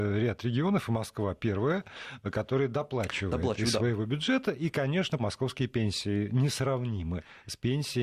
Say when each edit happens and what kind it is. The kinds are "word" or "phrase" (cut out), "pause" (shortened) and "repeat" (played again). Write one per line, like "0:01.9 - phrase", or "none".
0:05.2 - word